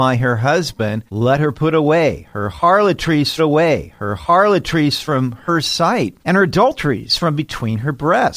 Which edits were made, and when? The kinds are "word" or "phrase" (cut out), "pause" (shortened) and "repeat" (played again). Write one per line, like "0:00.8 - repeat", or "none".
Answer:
0:01.1 - pause
0:03.4 - repeat
0:06.2 - pause